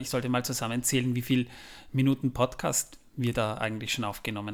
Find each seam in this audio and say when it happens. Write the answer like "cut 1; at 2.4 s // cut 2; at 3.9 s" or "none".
none